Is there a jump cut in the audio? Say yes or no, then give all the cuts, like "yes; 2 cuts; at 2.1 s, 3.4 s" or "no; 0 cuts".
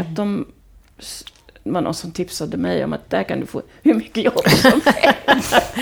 no; 0 cuts